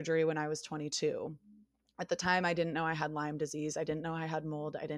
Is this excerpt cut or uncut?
uncut